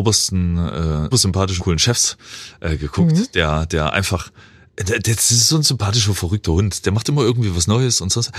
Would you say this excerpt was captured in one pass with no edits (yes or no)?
no